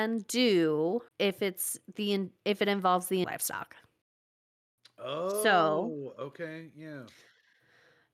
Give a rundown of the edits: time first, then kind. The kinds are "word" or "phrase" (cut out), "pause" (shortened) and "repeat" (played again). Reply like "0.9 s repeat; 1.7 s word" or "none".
1.1 s pause; 3.2 s phrase